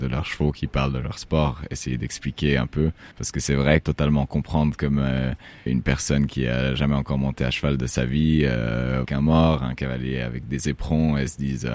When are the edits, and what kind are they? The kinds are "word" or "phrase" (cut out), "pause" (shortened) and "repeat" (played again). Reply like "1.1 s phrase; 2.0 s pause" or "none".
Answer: 3.1 s pause; 3.8 s phrase; 5.7 s word; 9.1 s phrase